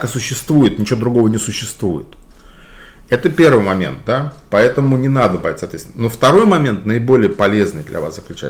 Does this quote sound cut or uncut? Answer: uncut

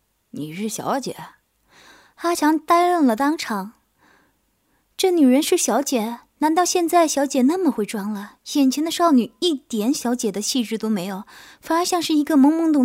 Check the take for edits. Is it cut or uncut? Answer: uncut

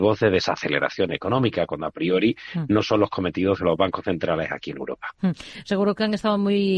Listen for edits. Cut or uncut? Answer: uncut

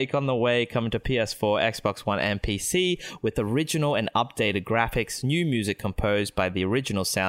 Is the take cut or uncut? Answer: uncut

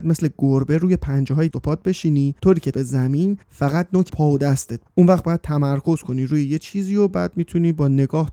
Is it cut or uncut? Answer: cut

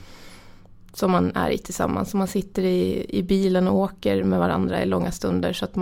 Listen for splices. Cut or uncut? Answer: uncut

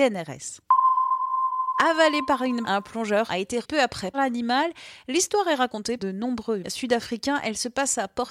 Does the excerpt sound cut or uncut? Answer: cut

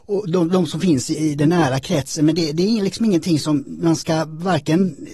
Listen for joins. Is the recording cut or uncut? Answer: cut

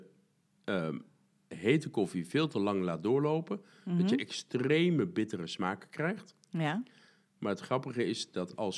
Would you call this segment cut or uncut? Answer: uncut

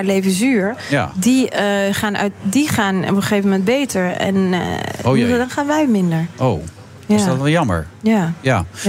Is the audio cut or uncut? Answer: uncut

